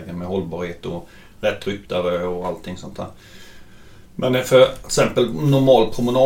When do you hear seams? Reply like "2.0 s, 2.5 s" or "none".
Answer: none